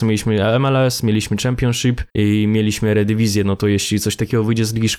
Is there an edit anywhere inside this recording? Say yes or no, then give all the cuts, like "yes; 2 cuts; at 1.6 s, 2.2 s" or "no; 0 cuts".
yes; 1 cut; at 2.1 s